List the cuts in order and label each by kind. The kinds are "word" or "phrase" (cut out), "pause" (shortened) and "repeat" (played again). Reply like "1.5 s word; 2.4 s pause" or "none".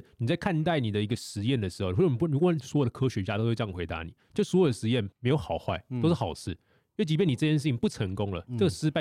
5.1 s pause